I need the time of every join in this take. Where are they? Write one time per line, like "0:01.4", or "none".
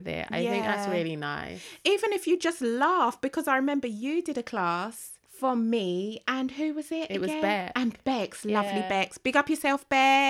0:05.2